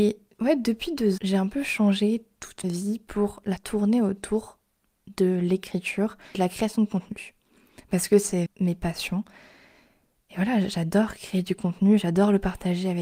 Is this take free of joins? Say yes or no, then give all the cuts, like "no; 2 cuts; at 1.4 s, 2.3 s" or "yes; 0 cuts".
no; 5 cuts; at 1.2 s, 2.6 s, 3.6 s, 6.3 s, 8.5 s